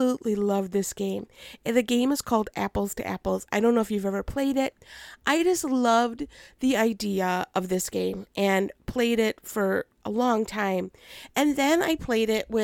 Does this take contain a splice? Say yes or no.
no